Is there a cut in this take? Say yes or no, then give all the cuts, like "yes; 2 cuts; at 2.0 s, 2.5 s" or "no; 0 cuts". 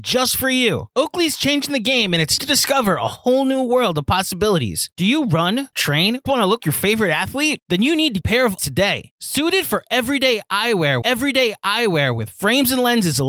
yes; 7 cuts; at 2.4 s, 5.7 s, 6.3 s, 6.6 s, 8.2 s, 8.6 s, 11.0 s